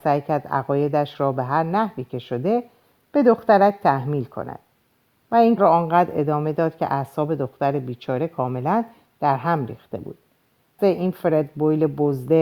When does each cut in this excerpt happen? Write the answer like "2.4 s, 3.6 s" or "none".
5.6 s, 10.8 s